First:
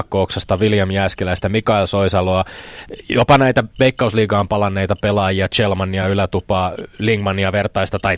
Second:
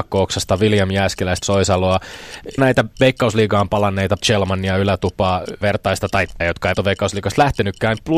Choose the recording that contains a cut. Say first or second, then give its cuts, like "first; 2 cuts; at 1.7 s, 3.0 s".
second; 6 cuts; at 1.4 s, 2.6 s, 4.2 s, 5.6 s, 6.4 s, 6.7 s